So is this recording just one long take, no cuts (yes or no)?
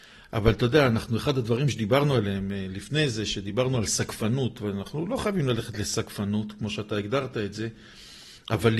yes